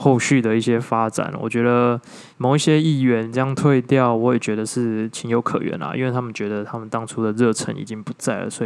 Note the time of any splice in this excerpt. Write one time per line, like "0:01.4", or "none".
0:02.3

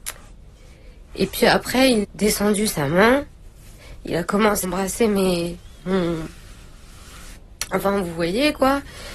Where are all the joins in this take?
0:02.0
0:04.6

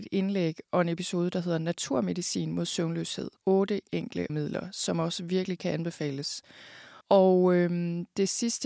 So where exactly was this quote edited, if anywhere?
0:03.4
0:04.3
0:07.0

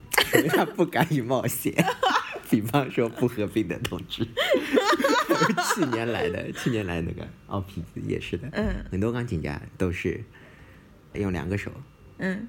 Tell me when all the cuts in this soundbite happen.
0:11.1

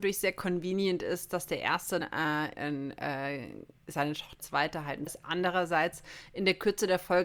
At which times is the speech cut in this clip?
0:02.0
0:02.5
0:04.4
0:05.1

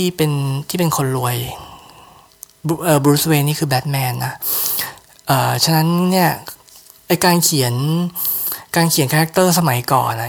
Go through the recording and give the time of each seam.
none

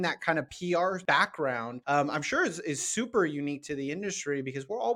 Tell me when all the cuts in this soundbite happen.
none

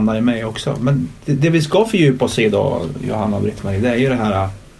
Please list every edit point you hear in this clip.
none

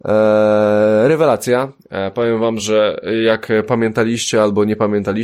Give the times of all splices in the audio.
none

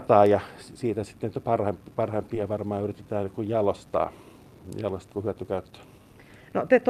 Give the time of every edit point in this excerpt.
0:05.1

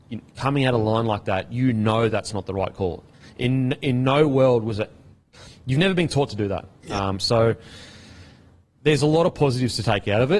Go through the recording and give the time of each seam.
none

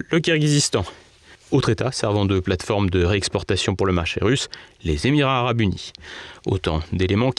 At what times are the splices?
none

